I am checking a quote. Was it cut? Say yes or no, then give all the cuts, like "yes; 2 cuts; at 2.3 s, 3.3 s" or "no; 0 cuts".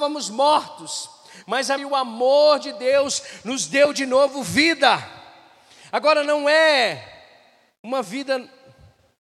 yes; 1 cut; at 1.8 s